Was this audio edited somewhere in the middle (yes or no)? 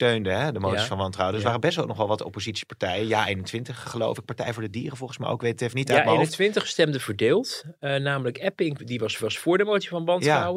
yes